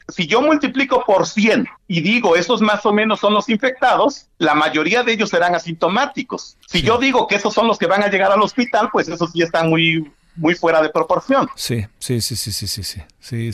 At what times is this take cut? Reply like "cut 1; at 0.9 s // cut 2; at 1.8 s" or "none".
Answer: cut 1; at 1.8 s // cut 2; at 4.3 s // cut 3; at 6.6 s